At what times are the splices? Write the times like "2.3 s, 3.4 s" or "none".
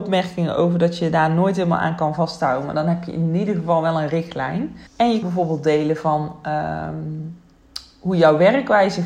4.9 s, 5.2 s